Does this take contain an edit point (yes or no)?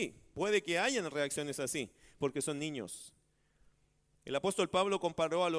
no